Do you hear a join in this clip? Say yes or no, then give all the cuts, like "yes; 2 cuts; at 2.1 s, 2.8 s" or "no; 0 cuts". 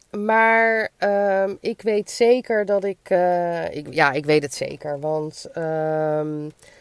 no; 0 cuts